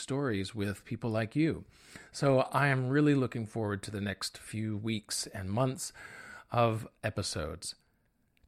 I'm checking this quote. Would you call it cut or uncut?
uncut